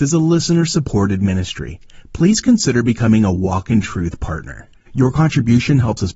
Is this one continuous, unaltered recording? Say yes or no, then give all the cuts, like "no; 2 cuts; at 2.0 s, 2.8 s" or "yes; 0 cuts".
yes; 0 cuts